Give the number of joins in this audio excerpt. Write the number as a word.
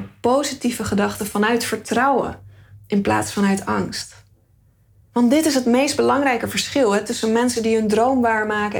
zero